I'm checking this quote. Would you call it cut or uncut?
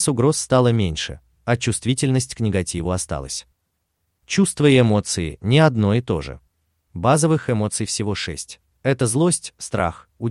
uncut